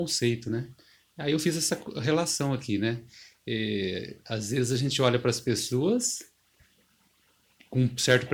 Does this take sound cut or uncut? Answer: uncut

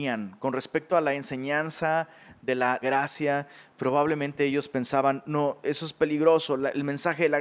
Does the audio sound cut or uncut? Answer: cut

